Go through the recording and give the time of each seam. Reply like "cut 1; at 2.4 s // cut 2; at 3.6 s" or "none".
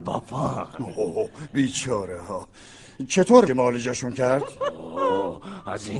cut 1; at 3.5 s

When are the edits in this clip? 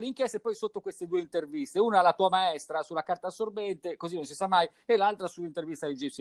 none

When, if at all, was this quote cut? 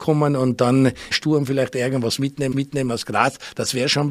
cut 1; at 1.1 s // cut 2; at 2.5 s

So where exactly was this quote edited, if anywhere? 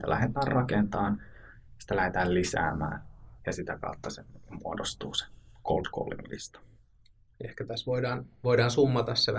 none

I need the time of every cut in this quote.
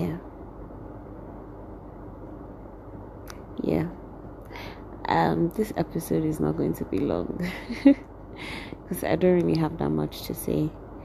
none

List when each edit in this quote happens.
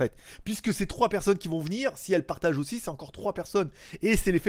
none

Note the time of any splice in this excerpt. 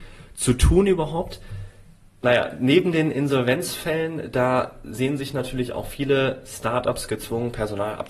none

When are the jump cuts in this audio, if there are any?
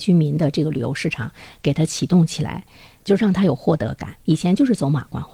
cut 1; at 4.2 s

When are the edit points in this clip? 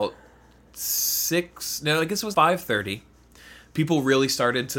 cut 1; at 2.3 s

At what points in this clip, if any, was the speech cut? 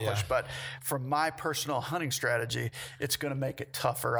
none

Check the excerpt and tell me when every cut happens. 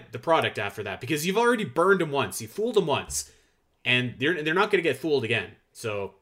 none

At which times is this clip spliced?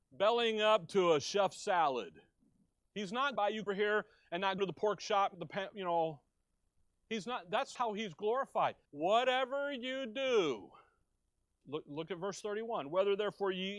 cut 1; at 2.7 s // cut 2; at 3.4 s // cut 3; at 3.7 s // cut 4; at 4.6 s // cut 5; at 5.3 s // cut 6; at 7.8 s // cut 7; at 8.9 s // cut 8; at 11.6 s

